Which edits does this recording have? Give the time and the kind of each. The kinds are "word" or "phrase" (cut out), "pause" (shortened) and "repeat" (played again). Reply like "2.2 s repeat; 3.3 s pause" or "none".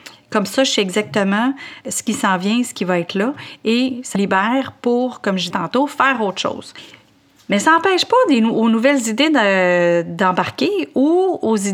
4.1 s word; 5.5 s word